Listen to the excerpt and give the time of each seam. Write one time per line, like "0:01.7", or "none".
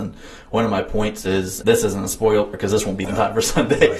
0:01.6
0:02.5
0:03.0